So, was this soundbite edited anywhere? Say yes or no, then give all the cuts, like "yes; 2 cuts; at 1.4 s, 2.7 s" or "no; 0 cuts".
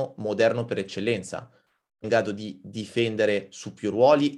yes; 1 cut; at 2.0 s